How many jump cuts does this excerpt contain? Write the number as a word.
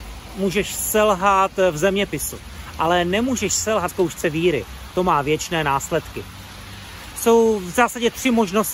one